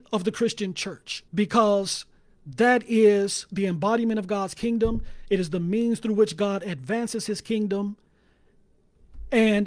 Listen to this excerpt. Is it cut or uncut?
cut